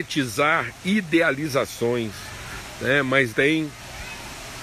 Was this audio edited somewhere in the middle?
yes; 1 cut; at 3.3 s

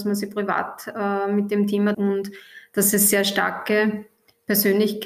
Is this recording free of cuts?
no; 1 cut; at 1.9 s

